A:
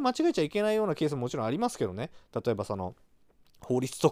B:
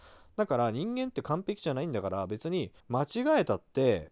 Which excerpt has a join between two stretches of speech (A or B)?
B